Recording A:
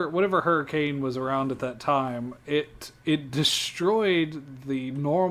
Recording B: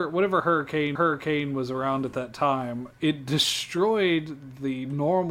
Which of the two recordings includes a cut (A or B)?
B